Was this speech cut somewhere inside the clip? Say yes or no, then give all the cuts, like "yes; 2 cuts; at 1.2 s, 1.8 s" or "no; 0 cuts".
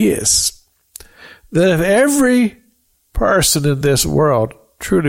no; 0 cuts